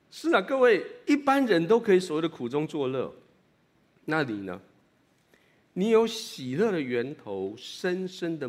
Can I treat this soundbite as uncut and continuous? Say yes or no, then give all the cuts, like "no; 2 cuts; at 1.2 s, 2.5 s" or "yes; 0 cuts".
yes; 0 cuts